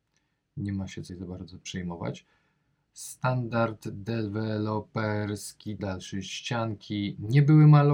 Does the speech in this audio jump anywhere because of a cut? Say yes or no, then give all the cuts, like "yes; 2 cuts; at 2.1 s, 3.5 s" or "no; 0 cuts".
yes; 2 cuts; at 1.1 s, 5.8 s